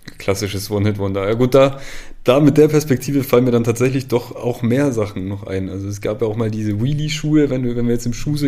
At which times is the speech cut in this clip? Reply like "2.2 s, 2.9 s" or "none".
none